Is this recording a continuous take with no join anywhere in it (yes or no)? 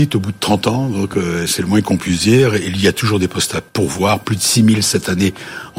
no